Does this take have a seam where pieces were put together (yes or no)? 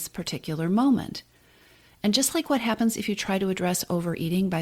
no